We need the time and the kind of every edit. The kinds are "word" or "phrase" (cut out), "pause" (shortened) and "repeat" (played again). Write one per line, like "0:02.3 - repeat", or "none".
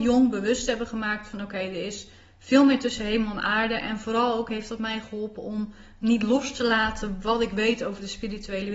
none